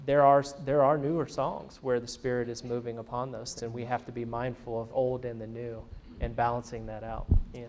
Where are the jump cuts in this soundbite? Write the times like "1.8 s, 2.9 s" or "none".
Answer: 3.6 s, 4.9 s